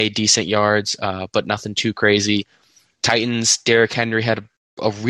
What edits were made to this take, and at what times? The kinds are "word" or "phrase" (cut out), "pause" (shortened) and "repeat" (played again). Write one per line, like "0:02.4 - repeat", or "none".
none